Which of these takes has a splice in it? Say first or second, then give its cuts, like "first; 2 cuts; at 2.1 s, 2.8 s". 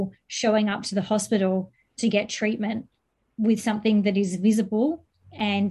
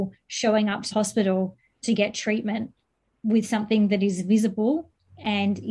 second; 1 cut; at 0.9 s